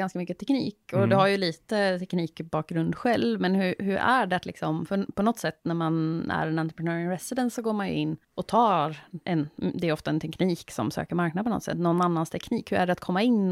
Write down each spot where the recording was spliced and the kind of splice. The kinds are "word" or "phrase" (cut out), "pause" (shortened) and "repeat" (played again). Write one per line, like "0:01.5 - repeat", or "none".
0:08.2 - pause
0:09.2 - pause